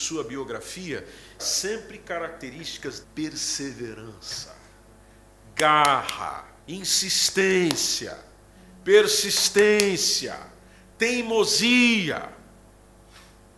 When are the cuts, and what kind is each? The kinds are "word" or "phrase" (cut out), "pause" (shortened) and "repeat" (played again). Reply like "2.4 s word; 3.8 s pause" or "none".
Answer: 1.4 s word; 3.0 s word; 6.6 s pause